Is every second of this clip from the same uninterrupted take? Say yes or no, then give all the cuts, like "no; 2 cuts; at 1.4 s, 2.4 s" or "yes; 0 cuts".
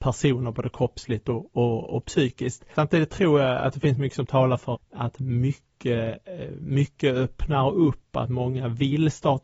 no; 1 cut; at 4.7 s